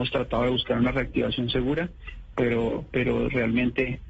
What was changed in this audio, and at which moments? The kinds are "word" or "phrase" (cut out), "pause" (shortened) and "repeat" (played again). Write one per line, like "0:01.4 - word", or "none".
none